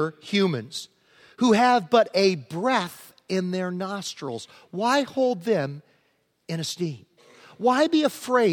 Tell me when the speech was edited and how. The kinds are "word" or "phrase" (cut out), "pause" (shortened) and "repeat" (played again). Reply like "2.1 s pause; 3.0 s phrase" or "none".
none